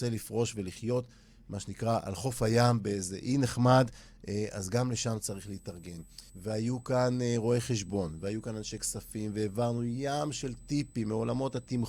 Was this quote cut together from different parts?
yes; 1 cut; at 6.3 s

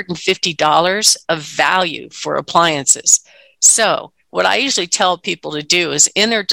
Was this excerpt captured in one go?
yes; 0 cuts

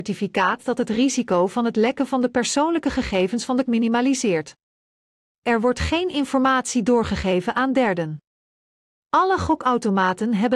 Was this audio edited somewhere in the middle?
yes; 1 cut; at 3.7 s

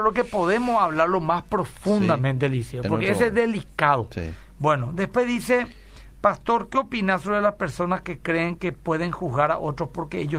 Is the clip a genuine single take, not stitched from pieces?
yes; 0 cuts

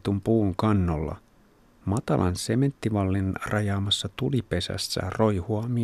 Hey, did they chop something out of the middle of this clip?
no; 0 cuts

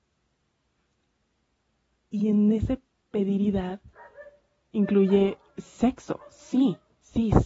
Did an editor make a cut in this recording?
no; 0 cuts

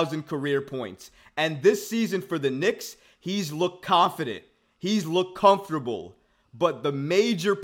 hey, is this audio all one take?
yes; 0 cuts

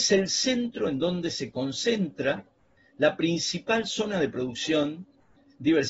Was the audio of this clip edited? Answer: no; 0 cuts

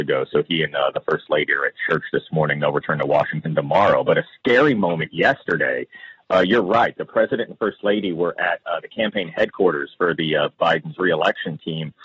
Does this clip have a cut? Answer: no; 0 cuts

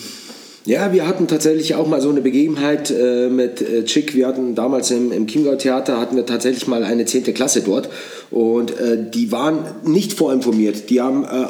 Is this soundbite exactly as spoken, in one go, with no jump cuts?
yes; 0 cuts

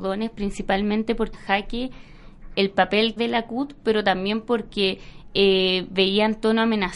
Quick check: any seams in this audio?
yes; 3 cuts; at 1.3 s, 2.5 s, 3.2 s

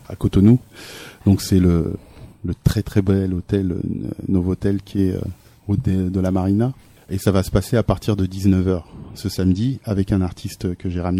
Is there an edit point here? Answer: no; 0 cuts

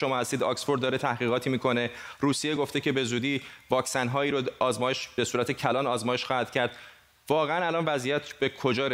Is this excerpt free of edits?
yes; 0 cuts

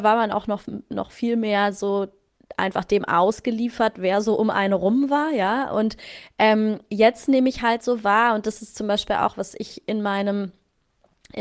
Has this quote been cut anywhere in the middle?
no; 0 cuts

